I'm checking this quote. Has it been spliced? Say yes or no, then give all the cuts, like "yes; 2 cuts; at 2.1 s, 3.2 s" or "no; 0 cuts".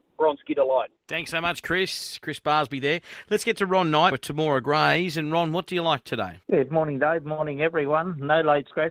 yes; 3 cuts; at 1.0 s, 4.1 s, 6.4 s